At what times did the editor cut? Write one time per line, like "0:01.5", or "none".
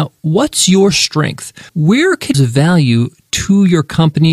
0:01.7
0:02.3